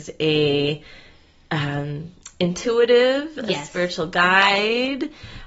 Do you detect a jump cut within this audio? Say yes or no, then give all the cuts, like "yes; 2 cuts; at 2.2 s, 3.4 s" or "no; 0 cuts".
no; 0 cuts